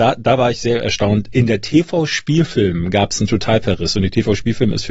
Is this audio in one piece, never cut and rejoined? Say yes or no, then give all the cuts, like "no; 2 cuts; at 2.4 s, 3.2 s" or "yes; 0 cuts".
yes; 0 cuts